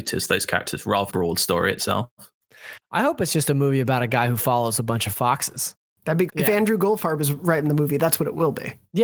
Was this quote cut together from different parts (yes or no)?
yes